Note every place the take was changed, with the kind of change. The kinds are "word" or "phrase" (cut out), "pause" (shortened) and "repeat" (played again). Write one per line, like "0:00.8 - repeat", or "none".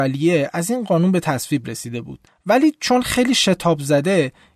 0:02.3 - pause